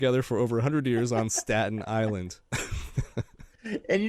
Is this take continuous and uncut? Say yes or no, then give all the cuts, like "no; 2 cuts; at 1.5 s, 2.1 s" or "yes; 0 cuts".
yes; 0 cuts